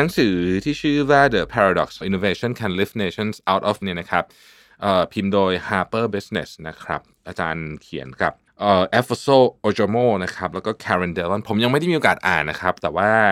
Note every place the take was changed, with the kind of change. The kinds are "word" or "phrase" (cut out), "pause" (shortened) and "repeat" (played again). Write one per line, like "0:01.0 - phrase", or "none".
0:01.5 - word
0:02.0 - word
0:03.8 - word
0:08.5 - pause